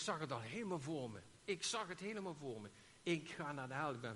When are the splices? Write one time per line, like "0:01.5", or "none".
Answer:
none